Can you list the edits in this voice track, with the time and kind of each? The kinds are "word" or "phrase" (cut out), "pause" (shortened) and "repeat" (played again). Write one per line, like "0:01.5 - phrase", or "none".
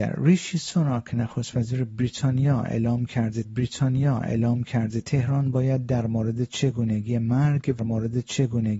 0:03.4 - repeat
0:07.8 - repeat